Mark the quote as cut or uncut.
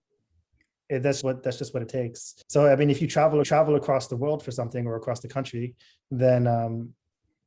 cut